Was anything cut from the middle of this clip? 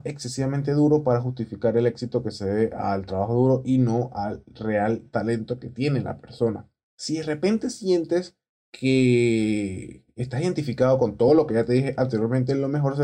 no; 0 cuts

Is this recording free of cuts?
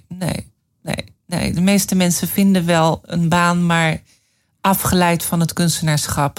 yes; 0 cuts

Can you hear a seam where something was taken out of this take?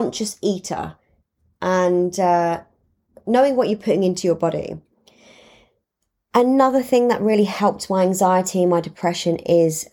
no; 0 cuts

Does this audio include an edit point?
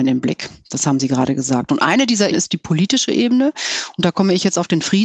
yes; 1 cut; at 2.3 s

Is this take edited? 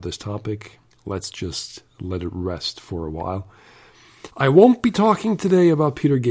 yes; 2 cuts; at 0.9 s, 4.3 s

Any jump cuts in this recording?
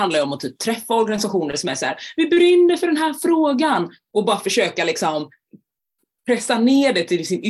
no; 0 cuts

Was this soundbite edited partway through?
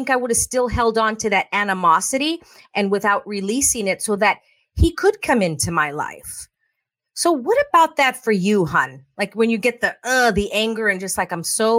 no; 0 cuts

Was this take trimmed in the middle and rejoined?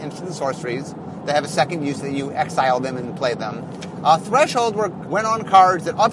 yes; 1 cut; at 5.1 s

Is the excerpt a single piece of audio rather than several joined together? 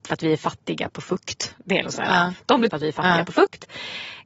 no; 2 cuts; at 1.8 s, 2.7 s

